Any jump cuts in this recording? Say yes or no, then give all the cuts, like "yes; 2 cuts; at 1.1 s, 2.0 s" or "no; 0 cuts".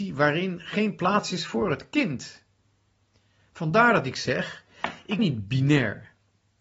yes; 1 cut; at 5.2 s